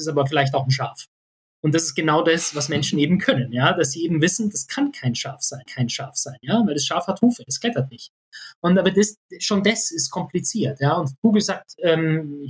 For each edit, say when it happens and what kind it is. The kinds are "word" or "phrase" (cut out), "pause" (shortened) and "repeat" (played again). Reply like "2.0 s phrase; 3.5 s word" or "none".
5.7 s repeat